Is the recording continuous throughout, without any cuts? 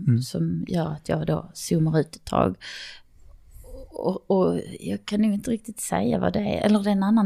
yes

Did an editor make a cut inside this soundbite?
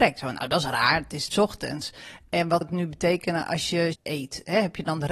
yes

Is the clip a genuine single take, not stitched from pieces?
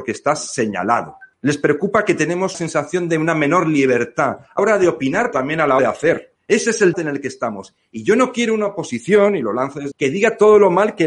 no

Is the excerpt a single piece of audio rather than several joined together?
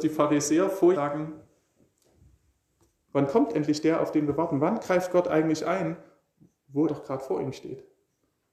no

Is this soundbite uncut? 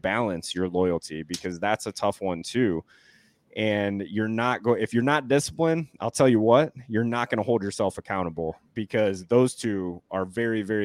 yes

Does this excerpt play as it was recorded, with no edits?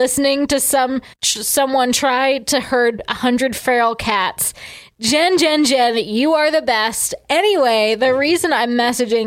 no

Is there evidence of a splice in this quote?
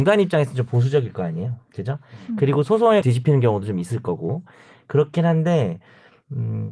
yes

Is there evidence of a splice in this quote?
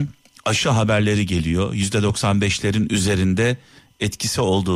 no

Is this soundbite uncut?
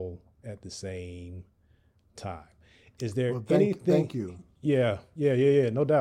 yes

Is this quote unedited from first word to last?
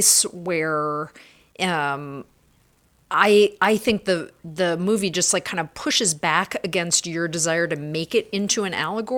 yes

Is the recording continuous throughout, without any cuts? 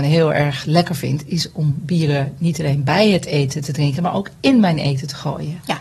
yes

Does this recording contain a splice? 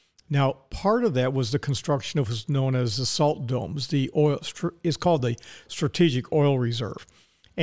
no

